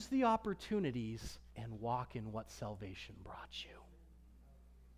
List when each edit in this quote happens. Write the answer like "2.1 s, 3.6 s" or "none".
1.5 s